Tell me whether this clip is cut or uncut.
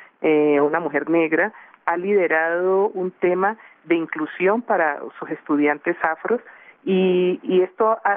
uncut